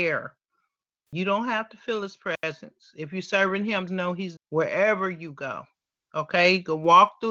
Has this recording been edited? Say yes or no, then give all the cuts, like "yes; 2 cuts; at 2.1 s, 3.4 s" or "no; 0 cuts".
yes; 2 cuts; at 3.9 s, 4.4 s